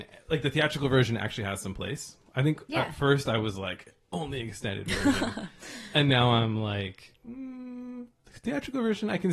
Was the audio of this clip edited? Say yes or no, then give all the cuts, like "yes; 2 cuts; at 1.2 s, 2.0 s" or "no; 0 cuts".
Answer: no; 0 cuts